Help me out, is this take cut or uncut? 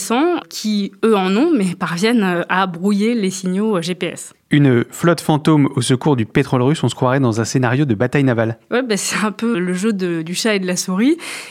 cut